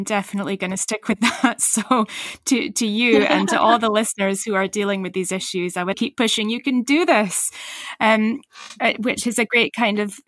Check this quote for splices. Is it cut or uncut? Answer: cut